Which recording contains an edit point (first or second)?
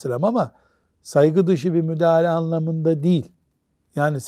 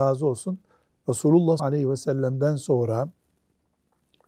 second